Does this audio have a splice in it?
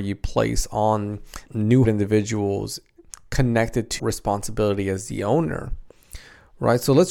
yes; 3 cuts; at 1.5 s, 1.8 s, 4.0 s

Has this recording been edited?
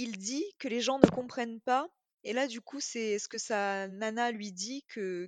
no; 0 cuts

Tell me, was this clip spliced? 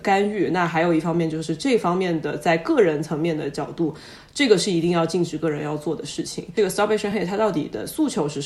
no; 0 cuts

